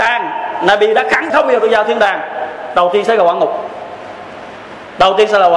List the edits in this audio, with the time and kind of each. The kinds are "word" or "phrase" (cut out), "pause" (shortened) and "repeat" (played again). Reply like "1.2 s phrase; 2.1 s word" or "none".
1.3 s word